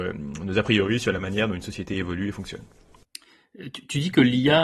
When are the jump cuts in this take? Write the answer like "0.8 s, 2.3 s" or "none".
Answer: none